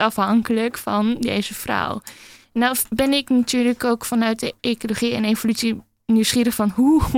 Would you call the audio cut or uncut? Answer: uncut